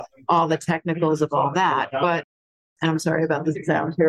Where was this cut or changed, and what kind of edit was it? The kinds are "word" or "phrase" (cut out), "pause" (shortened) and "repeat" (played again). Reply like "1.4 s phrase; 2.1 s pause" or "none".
none